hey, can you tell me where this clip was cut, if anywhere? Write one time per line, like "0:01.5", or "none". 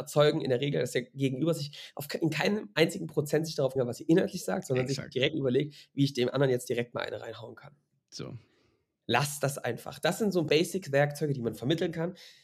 0:03.8
0:05.3
0:10.5